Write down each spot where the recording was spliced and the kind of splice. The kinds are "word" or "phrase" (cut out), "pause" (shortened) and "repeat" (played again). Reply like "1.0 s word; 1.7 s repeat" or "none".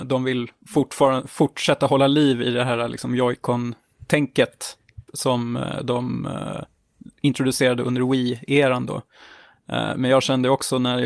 5.1 s pause